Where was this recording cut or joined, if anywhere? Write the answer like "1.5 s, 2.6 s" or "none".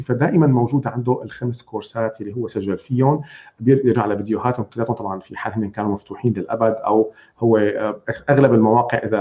3.9 s